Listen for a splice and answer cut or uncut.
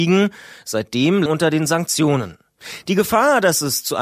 cut